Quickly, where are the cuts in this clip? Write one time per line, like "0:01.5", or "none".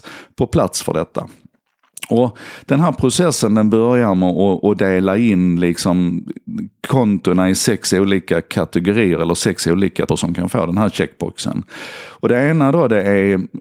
0:10.1